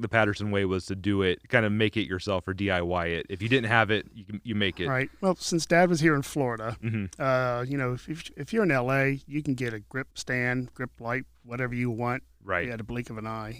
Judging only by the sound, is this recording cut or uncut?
cut